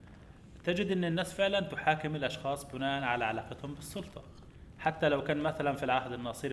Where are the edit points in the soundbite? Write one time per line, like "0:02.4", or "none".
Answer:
none